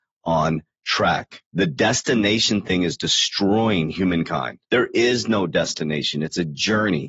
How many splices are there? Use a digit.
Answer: 2